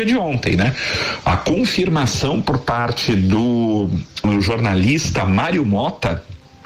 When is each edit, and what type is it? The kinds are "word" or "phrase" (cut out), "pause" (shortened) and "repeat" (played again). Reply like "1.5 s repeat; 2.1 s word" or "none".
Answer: none

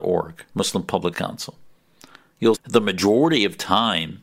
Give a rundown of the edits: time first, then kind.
1.1 s word; 2.5 s word

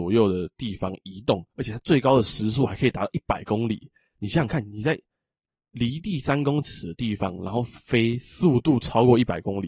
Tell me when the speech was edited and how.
1.5 s pause

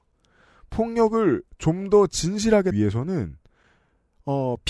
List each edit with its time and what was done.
1.5 s pause; 2.7 s word

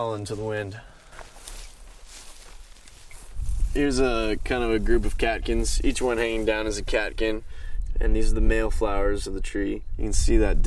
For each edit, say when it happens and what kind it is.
none

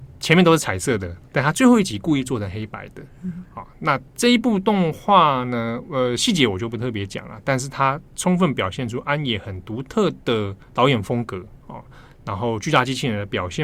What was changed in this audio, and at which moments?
4.1 s pause; 10.6 s pause

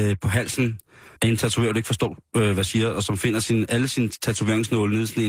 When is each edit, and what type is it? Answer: 1.2 s pause

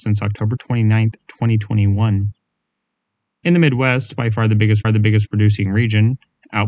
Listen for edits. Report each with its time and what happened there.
4.8 s repeat

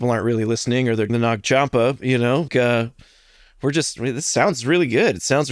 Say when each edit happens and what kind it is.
1.1 s phrase; 2.5 s word

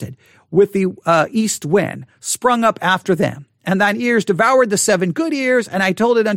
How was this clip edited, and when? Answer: none

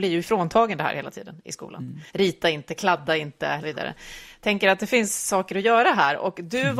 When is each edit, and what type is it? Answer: 2.1 s pause; 3.6 s phrase

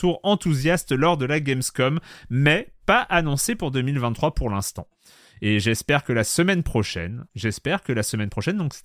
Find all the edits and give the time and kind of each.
7.3 s pause

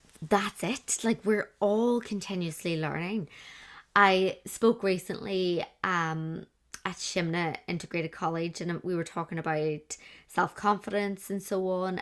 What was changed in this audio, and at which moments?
none

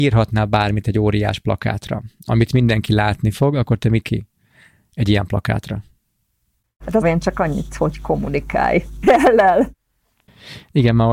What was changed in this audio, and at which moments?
4.0 s word; 7.0 s phrase; 9.0 s word

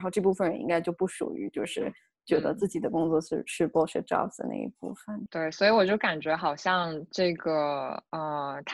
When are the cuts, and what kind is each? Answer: none

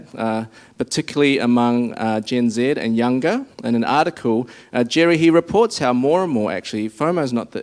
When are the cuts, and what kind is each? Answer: 3.5 s pause

